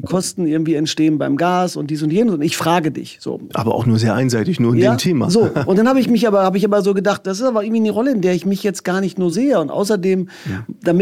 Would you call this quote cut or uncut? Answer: cut